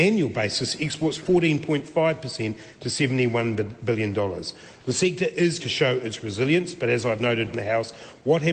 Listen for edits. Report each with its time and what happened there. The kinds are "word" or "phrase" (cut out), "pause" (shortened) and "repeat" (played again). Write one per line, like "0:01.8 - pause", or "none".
0:01.2 - word
0:05.6 - word
0:07.5 - phrase